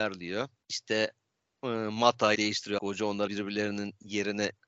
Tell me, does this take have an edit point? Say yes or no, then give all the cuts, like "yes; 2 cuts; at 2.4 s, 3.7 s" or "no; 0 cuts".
yes; 3 cuts; at 2.3 s, 2.8 s, 3.3 s